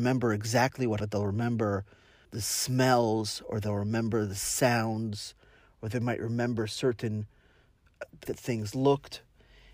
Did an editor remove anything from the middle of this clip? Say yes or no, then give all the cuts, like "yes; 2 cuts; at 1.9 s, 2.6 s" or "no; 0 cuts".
yes; 3 cuts; at 1.0 s, 2.2 s, 8.3 s